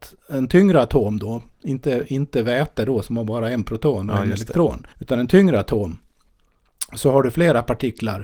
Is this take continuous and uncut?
no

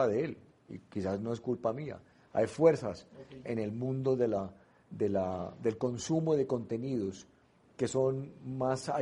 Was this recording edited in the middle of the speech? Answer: no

